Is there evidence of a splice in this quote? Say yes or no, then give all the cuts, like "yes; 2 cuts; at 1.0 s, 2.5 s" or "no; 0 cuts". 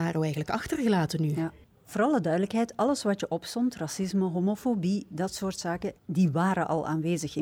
no; 0 cuts